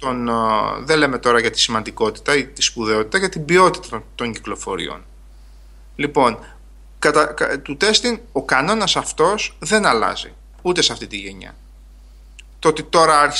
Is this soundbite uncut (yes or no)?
no